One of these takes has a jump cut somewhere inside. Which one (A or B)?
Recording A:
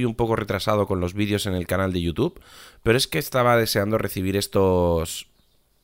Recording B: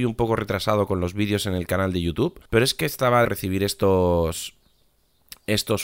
B